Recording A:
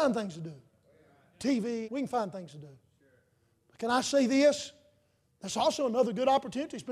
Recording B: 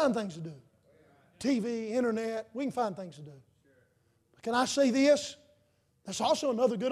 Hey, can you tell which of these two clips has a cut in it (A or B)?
A